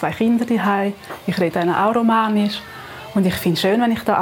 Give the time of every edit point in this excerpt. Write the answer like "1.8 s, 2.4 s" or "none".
1.5 s